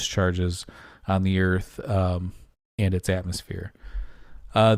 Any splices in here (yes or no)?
no